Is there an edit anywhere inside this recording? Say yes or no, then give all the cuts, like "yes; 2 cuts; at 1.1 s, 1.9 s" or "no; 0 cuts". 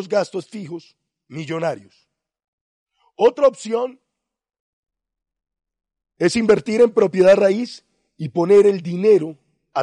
no; 0 cuts